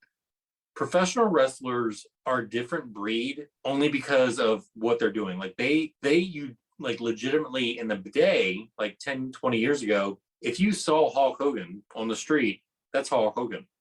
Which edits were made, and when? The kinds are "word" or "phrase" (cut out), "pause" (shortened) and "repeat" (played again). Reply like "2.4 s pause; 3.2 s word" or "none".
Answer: 2.1 s pause; 3.6 s pause; 5.9 s pause; 10.3 s pause; 11.9 s pause